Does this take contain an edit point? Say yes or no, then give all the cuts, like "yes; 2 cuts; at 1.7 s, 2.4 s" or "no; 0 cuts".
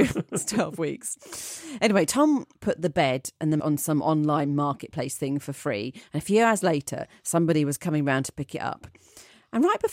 yes; 1 cut; at 3.6 s